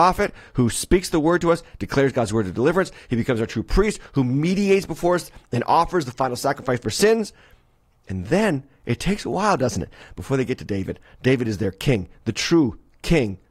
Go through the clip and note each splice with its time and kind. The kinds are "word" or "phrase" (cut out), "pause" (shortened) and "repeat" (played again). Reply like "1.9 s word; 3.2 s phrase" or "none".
none